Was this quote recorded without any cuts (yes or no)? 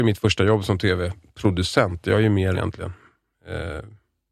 no